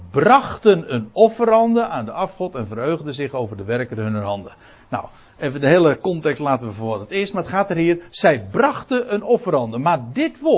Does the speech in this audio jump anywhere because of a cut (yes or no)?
no